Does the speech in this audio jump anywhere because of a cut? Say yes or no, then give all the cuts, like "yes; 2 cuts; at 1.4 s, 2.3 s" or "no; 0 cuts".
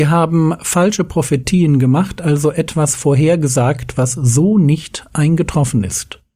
no; 0 cuts